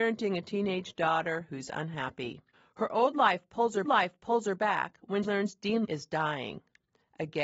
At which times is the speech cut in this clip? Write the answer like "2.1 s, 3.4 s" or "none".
2.5 s, 3.8 s, 5.2 s, 5.8 s